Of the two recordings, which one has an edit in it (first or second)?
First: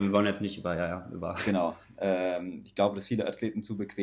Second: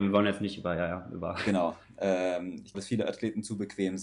second